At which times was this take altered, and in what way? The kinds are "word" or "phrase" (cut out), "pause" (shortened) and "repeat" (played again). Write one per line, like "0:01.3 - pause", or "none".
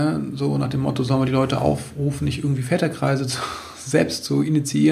none